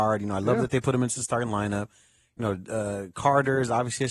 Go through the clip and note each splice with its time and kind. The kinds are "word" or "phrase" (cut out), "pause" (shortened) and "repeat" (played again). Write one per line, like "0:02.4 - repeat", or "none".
none